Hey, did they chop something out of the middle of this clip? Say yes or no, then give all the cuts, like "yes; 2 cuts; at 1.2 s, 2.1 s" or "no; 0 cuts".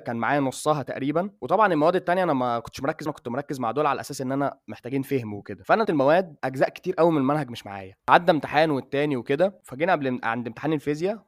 yes; 2 cuts; at 3.1 s, 5.8 s